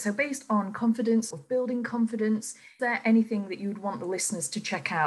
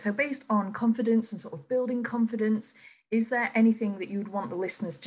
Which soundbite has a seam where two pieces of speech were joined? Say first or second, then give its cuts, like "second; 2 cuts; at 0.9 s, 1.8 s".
first; 2 cuts; at 1.3 s, 2.8 s